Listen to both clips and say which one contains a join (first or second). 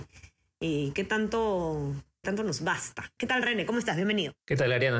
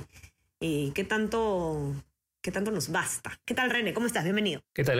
first